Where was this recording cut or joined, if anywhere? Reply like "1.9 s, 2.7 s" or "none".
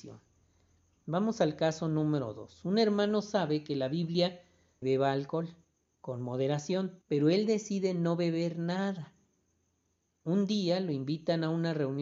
4.8 s, 7.0 s